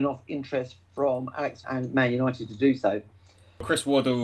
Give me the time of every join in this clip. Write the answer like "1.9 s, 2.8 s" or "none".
1.6 s